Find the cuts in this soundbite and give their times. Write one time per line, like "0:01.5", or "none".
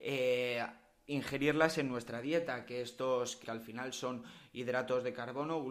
0:03.4